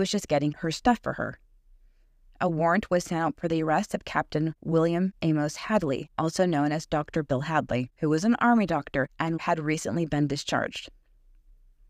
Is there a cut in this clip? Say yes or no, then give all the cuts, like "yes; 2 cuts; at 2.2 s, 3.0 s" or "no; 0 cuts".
no; 0 cuts